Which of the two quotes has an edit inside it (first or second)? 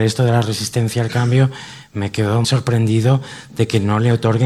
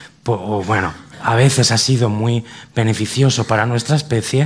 first